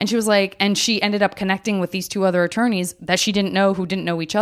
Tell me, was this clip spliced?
no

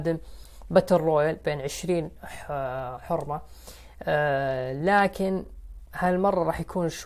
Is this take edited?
no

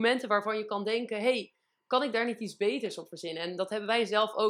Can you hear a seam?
no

